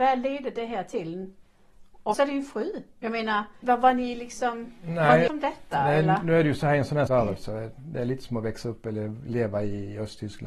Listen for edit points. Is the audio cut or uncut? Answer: cut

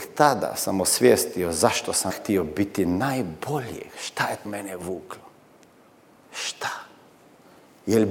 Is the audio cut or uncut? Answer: cut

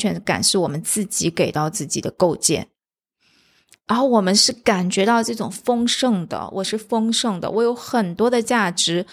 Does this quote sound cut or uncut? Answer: uncut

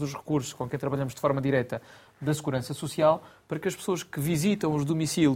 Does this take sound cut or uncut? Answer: uncut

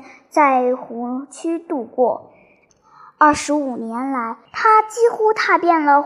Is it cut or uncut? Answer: cut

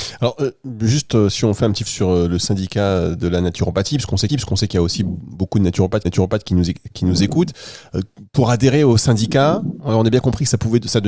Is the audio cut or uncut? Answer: cut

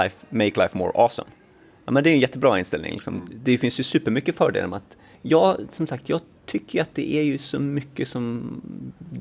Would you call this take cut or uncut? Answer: uncut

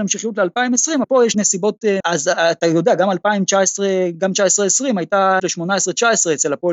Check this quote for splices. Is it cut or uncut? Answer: cut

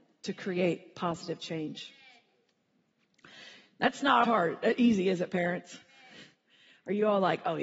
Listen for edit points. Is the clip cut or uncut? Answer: cut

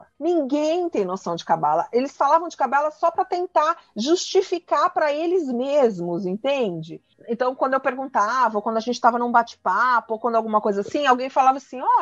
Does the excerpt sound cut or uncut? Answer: uncut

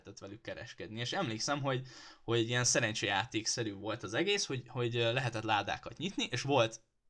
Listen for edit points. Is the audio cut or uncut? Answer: uncut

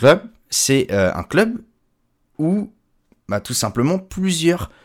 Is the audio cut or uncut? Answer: uncut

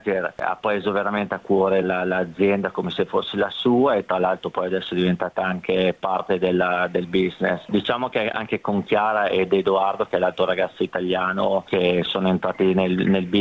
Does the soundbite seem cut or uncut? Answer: cut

